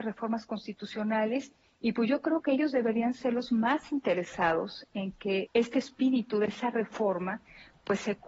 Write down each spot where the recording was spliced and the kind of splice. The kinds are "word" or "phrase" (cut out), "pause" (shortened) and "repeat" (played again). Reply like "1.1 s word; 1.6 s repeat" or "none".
5.5 s word